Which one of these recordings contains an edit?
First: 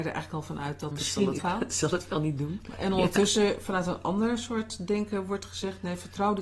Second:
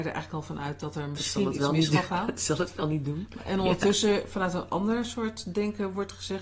first; 2 cuts; at 0.9 s, 1.4 s

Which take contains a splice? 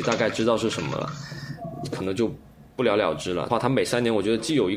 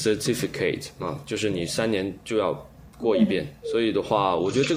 first; 1 cut; at 3.5 s

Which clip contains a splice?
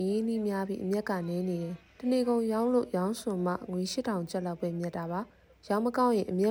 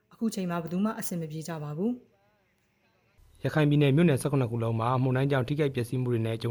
first; 2 cuts; at 1.9 s, 5.3 s

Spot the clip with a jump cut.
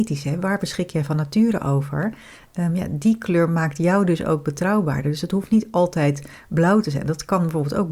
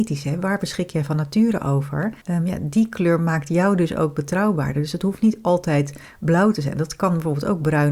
second; 1 cut; at 2.2 s

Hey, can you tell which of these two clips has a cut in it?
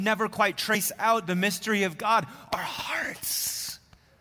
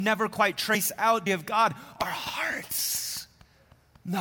second; 1 cut; at 1.3 s

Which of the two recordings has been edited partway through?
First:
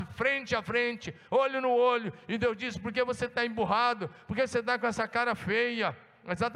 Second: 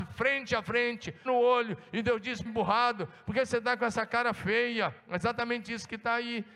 second; 3 cuts; at 1.3 s, 2.5 s, 5.0 s

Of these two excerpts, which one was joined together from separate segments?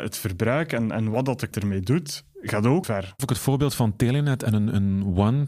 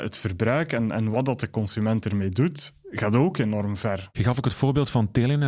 first; 3 cuts; at 1.5 s, 2.8 s, 3.2 s

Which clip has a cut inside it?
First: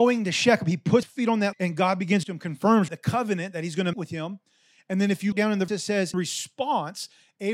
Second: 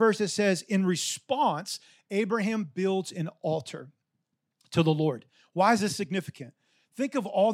first; 8 cuts; at 1.0 s, 1.5 s, 2.2 s, 2.9 s, 3.9 s, 5.3 s, 5.7 s, 6.1 s

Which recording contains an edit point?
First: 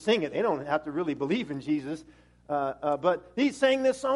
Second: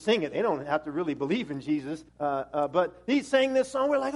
second; 1 cut; at 2.1 s

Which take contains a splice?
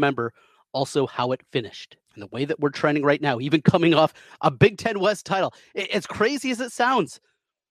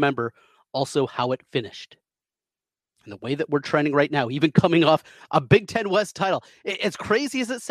first; 1 cut; at 2.0 s

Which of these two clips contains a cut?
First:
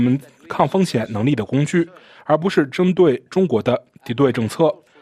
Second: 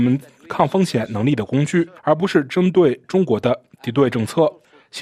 second; 1 cut; at 2.0 s

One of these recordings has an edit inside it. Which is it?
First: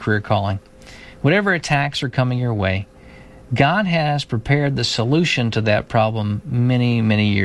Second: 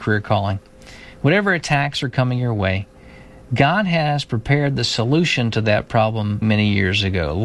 second; 1 cut; at 6.4 s

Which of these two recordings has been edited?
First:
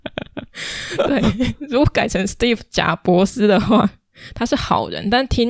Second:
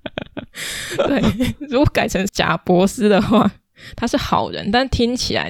second; 1 cut; at 2.3 s

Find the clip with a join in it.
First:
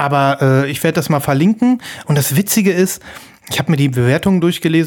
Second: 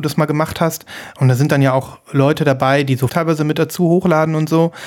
second; 1 cut; at 3.1 s

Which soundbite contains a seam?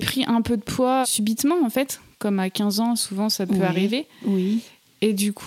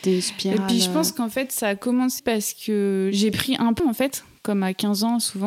second; 2 cuts; at 2.2 s, 3.8 s

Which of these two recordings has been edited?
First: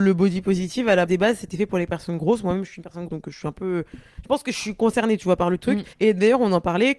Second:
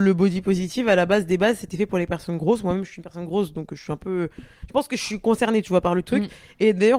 first; 3 cuts; at 1.1 s, 3.1 s, 5.9 s

